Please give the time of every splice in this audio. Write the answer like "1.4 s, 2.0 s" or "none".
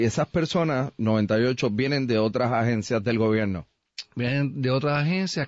none